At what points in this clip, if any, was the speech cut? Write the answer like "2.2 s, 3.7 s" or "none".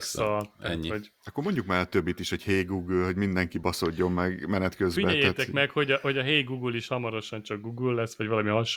none